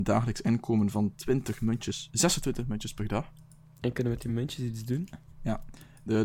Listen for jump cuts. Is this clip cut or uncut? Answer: uncut